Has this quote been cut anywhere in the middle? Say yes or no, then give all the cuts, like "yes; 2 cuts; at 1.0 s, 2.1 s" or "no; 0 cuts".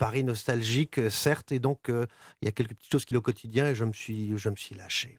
yes; 1 cut; at 3.1 s